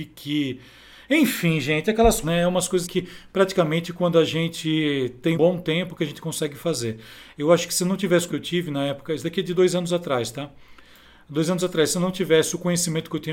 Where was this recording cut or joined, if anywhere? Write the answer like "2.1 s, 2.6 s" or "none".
2.2 s, 2.8 s, 5.3 s, 8.3 s